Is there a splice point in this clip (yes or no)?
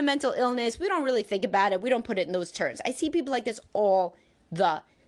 no